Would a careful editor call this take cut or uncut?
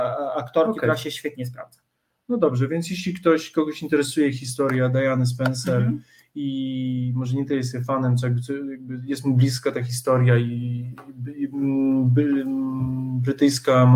uncut